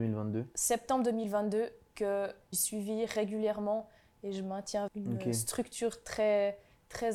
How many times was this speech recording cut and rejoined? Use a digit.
2